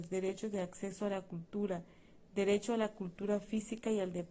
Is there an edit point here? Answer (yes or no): no